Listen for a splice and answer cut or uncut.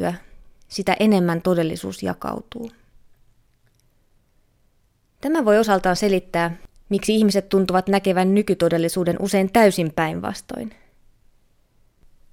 uncut